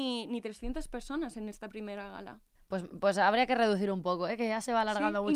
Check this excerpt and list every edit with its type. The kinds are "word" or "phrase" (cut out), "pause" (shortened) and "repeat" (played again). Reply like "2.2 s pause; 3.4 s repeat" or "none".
2.6 s pause